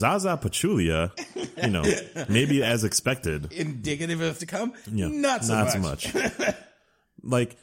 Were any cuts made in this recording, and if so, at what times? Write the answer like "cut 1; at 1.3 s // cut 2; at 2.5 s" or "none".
cut 1; at 1.6 s // cut 2; at 4.4 s